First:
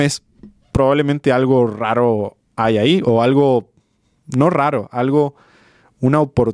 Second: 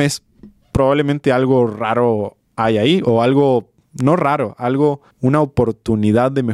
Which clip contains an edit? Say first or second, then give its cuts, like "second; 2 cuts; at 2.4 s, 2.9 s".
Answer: second; 2 cuts; at 3.8 s, 5.1 s